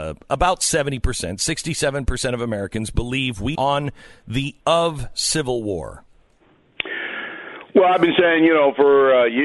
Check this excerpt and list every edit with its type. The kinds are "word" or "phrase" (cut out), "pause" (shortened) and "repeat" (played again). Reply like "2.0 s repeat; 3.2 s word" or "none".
3.5 s word; 4.6 s word